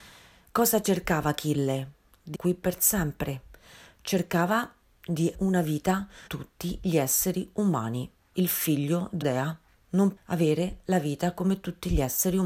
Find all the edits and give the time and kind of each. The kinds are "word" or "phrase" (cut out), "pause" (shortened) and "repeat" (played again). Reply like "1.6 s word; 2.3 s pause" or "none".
2.3 s word; 5.3 s word; 6.3 s word; 8.3 s word; 9.2 s word; 10.2 s word